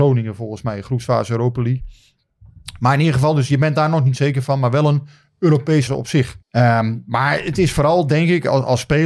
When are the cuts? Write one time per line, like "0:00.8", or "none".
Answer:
0:05.9
0:06.4